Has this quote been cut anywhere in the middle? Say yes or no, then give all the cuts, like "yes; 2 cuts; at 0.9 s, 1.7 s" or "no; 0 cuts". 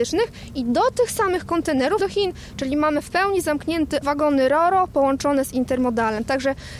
yes; 2 cuts; at 2.0 s, 4.0 s